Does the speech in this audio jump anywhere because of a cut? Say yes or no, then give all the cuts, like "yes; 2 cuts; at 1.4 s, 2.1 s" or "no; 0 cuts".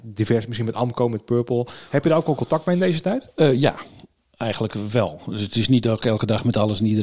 no; 0 cuts